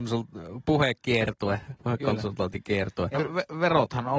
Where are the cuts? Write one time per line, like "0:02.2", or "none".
0:01.8
0:03.2